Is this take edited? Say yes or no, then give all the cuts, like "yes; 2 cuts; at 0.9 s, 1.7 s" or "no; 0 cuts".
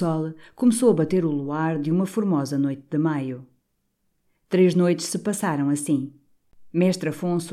no; 0 cuts